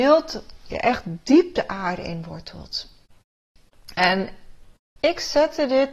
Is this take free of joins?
yes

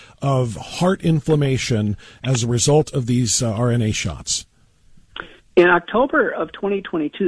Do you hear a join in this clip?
no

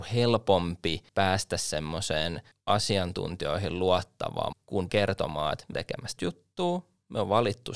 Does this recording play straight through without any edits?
no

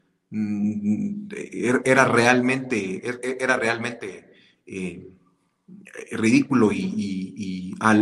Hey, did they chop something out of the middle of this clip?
no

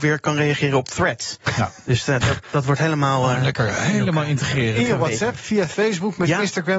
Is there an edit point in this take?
no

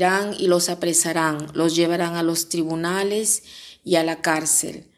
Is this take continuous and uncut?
yes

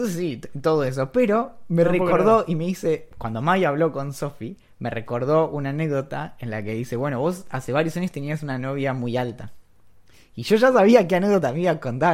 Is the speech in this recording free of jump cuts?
yes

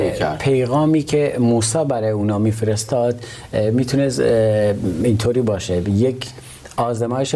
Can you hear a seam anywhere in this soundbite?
no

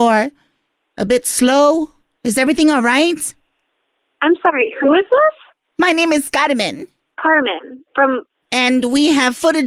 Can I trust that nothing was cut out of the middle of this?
yes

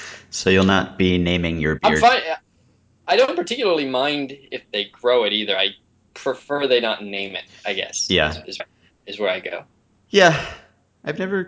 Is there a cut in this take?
yes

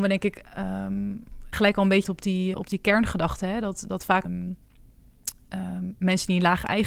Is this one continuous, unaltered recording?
no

